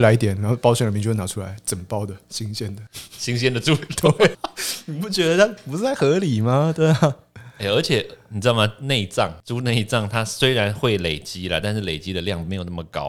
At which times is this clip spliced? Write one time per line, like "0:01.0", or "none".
0:04.3